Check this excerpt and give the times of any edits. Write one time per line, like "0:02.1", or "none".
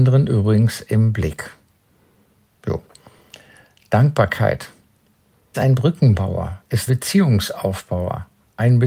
0:05.5
0:06.9